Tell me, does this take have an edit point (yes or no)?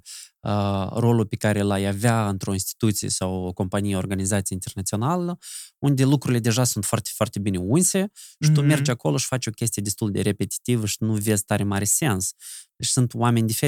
no